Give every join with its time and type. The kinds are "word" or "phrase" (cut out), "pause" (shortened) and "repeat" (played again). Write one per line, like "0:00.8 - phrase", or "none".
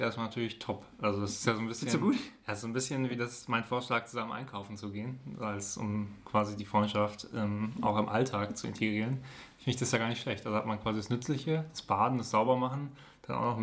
none